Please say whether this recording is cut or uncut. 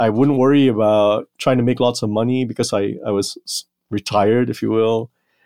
uncut